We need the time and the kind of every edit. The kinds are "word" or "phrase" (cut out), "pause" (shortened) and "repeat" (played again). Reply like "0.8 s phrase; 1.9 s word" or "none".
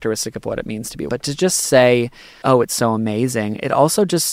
1.1 s word; 2.4 s word